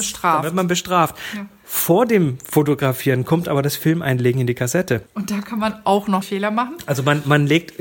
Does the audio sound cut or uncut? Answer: cut